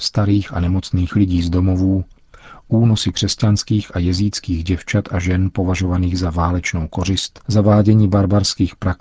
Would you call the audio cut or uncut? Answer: cut